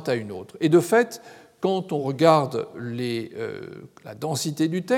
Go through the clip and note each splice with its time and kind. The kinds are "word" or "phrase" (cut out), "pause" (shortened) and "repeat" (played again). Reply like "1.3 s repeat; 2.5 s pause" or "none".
none